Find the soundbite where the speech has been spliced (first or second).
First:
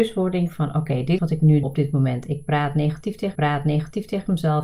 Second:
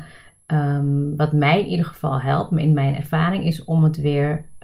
first